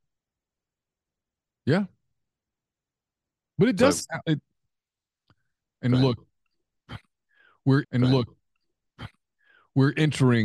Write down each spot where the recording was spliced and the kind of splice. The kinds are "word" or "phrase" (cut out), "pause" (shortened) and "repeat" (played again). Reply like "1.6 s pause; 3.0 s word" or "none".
7.8 s repeat